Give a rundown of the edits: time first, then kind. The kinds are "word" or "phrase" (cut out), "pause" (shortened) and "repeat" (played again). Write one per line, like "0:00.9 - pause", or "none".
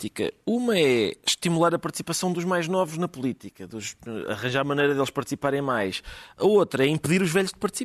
none